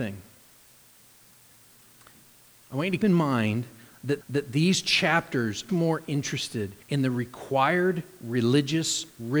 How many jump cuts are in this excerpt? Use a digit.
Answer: 4